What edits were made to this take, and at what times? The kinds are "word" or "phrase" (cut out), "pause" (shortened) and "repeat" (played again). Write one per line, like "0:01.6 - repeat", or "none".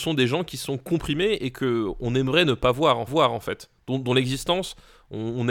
0:03.1 - repeat